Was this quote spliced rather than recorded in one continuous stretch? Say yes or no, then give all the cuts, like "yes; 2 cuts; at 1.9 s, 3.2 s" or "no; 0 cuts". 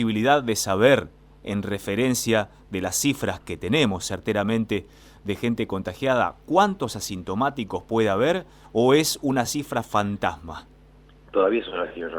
no; 0 cuts